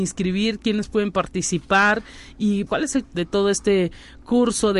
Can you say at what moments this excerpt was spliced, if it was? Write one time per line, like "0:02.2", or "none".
0:02.7
0:03.0